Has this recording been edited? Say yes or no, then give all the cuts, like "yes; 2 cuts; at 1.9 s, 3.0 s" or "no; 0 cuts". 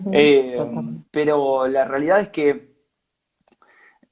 yes; 1 cut; at 1.1 s